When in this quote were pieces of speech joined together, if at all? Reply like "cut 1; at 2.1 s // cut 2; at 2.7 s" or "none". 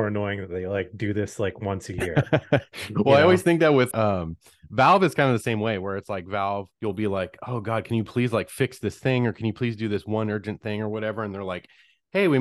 cut 1; at 3.9 s // cut 2; at 6.7 s